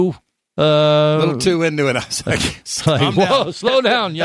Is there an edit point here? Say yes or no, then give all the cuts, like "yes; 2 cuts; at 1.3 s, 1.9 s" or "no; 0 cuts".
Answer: no; 0 cuts